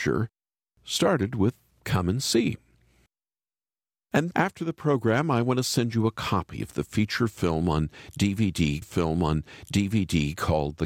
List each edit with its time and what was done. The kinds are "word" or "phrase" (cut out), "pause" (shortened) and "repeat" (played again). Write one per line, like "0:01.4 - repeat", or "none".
0:04.3 - word
0:08.8 - repeat

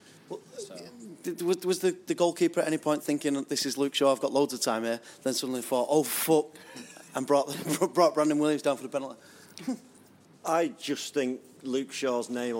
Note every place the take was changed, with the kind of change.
none

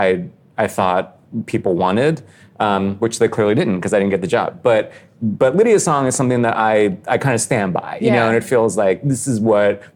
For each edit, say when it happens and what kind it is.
none

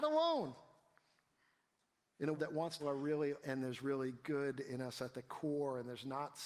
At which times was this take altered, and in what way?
0:02.3 - word
0:02.8 - phrase
0:03.4 - phrase

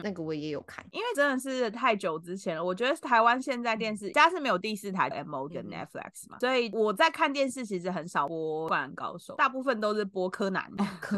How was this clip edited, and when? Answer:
0:00.9 - word
0:05.1 - phrase
0:05.5 - word

